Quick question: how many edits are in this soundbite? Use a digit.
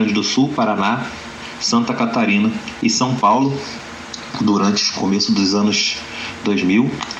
0